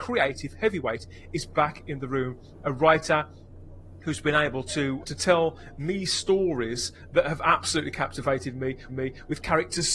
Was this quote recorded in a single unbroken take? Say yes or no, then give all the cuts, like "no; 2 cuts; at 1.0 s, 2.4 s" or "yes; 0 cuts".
no; 2 cuts; at 5.0 s, 8.9 s